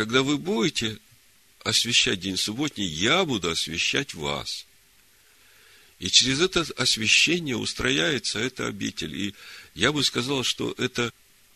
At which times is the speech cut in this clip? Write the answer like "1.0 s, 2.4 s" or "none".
none